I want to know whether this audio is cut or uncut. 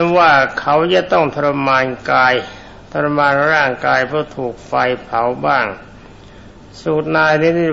uncut